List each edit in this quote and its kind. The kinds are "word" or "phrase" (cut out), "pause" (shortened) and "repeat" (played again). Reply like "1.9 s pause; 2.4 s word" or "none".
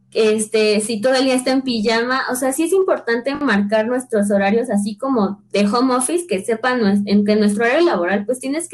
none